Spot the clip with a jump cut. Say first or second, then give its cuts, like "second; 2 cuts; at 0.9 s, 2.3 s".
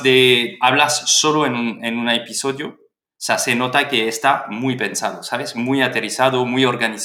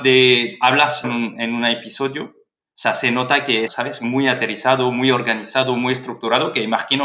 second; 2 cuts; at 1.0 s, 3.7 s